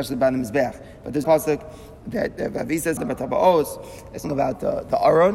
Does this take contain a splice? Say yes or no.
yes